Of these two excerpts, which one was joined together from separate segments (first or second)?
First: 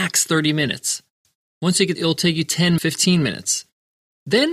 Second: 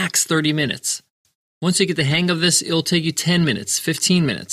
first